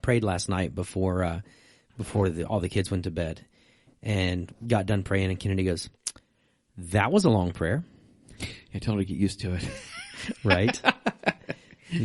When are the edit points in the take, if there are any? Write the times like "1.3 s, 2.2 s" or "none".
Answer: none